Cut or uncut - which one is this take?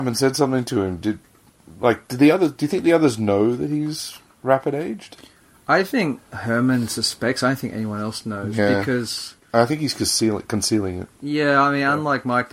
uncut